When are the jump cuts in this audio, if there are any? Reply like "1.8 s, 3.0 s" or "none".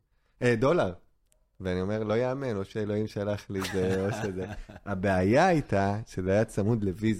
none